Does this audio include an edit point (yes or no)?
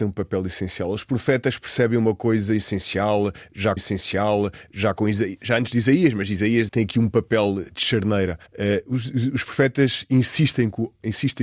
yes